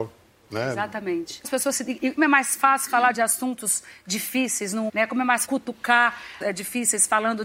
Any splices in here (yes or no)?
yes